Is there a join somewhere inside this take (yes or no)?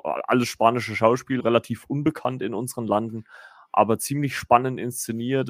yes